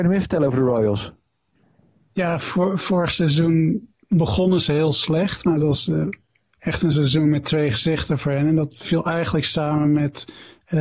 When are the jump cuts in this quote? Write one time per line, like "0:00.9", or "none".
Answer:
none